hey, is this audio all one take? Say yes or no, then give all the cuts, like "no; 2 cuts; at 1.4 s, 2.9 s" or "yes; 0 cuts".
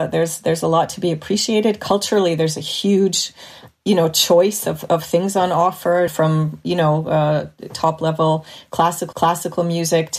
no; 2 cuts; at 6.1 s, 9.1 s